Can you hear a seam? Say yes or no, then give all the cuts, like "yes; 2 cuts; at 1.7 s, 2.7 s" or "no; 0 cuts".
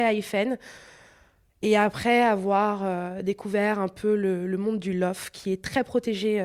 no; 0 cuts